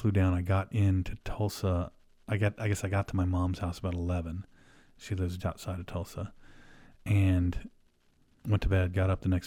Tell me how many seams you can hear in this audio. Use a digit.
1